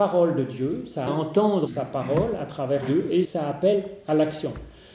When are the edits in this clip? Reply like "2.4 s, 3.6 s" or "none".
1.1 s, 1.7 s, 2.8 s, 3.2 s